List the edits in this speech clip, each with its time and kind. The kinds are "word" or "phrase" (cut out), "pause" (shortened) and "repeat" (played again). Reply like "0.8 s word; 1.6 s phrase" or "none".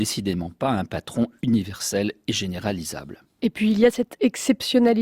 none